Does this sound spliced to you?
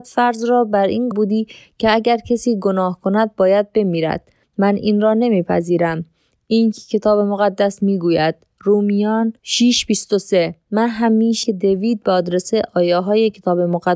yes; 5 cuts; at 1.1 s, 4.4 s, 6.7 s, 9.4 s, 11.4 s

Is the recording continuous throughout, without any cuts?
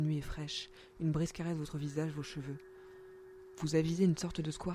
yes; 0 cuts

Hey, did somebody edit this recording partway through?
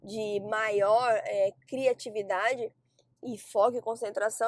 no; 0 cuts

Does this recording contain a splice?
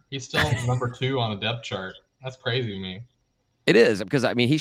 no; 0 cuts

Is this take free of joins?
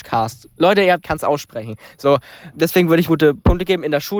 no; 3 cuts; at 1.0 s, 2.5 s, 3.1 s

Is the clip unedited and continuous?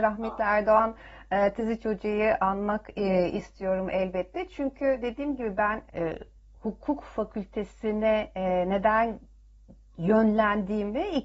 no; 1 cut; at 5.9 s

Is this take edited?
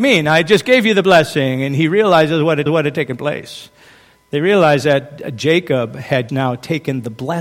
yes; 2 cuts; at 2.7 s, 6.3 s

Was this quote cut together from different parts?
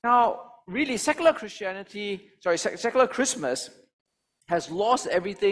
no; 0 cuts

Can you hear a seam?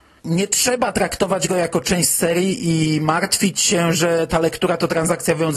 no; 0 cuts

